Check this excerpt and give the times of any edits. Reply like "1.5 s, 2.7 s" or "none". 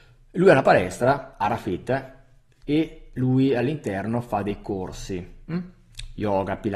2.6 s